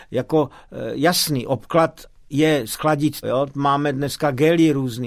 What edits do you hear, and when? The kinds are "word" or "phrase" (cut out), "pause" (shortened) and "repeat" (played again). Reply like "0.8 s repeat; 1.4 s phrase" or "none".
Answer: 3.2 s word